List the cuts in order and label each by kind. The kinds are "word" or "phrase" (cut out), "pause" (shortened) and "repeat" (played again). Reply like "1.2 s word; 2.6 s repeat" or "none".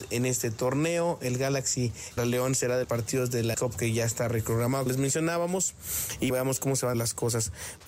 2.2 s word; 2.8 s word; 3.5 s word; 4.9 s word; 6.3 s word; 6.9 s word